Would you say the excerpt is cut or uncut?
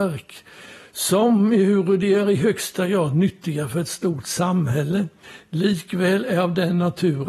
uncut